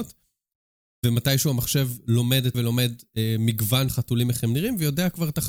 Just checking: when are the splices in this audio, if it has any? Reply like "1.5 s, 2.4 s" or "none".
2.5 s, 3.9 s